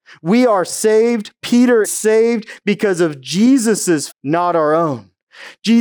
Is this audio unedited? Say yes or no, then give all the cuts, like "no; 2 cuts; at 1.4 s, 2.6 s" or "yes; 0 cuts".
no; 2 cuts; at 1.8 s, 4.1 s